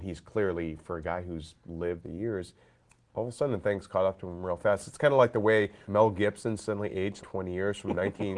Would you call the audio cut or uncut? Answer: cut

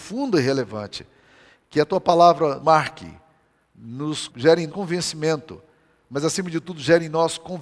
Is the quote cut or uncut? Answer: cut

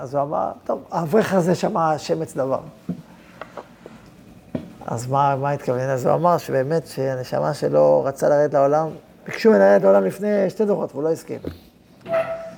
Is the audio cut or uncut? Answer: uncut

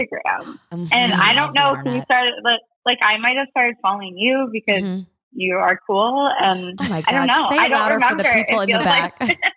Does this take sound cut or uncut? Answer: uncut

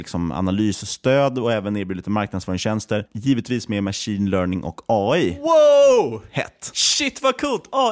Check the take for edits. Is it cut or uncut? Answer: uncut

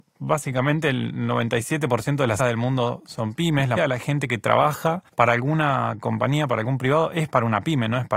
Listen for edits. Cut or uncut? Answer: cut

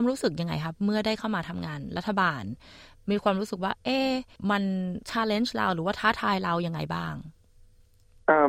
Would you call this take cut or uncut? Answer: uncut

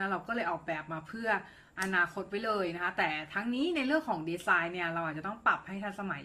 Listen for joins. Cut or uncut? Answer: uncut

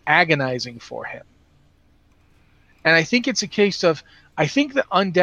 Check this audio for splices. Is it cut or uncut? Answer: uncut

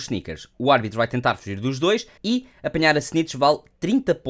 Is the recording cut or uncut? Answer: cut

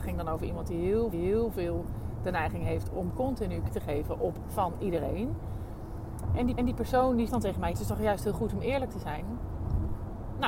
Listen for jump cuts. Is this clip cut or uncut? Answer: cut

